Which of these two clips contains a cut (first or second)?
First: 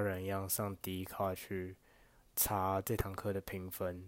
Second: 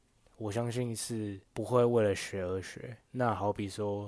second